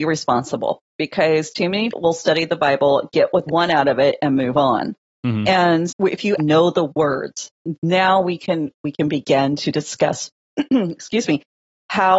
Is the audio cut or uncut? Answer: cut